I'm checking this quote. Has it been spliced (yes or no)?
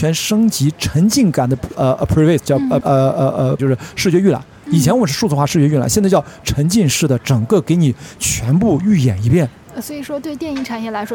yes